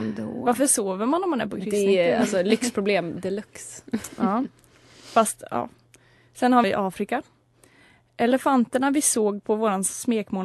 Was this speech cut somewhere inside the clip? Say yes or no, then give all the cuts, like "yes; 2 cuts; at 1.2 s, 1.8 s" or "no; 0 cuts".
yes; 1 cut; at 6.6 s